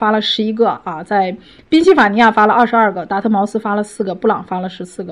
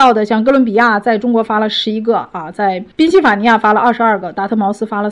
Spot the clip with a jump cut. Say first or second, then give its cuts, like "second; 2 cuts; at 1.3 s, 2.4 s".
second; 1 cut; at 2.9 s